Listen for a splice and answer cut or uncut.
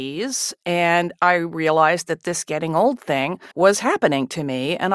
cut